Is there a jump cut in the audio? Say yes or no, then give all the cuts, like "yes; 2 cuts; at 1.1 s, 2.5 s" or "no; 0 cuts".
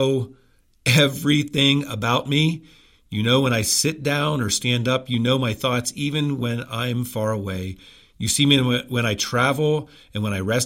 no; 0 cuts